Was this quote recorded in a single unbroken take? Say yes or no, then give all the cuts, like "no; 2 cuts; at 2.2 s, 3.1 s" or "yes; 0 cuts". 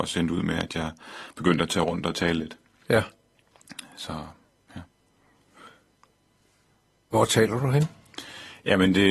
yes; 0 cuts